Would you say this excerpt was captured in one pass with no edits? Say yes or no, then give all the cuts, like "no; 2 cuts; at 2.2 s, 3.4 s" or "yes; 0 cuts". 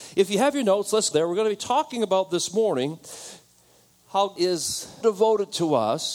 no; 3 cuts; at 1.1 s, 4.4 s, 5.0 s